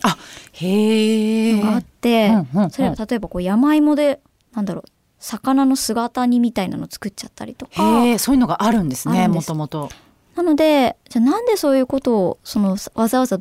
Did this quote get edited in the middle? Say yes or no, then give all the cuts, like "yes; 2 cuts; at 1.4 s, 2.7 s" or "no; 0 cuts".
no; 0 cuts